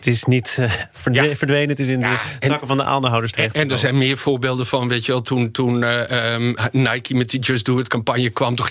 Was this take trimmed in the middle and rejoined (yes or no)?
no